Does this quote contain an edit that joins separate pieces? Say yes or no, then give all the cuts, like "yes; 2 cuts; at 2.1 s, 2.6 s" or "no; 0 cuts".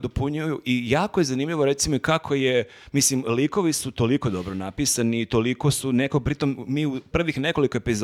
no; 0 cuts